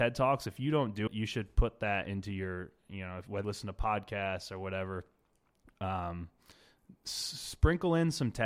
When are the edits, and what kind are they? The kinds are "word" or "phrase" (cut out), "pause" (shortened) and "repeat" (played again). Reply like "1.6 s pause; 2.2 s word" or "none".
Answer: 1.1 s word; 3.4 s word